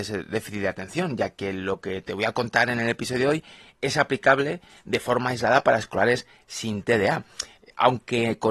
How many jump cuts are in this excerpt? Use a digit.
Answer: 0